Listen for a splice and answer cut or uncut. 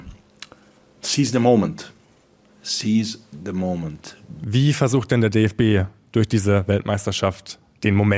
uncut